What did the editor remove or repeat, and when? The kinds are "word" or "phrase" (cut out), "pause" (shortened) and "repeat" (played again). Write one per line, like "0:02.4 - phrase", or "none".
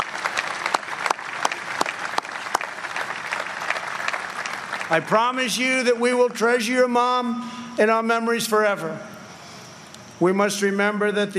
none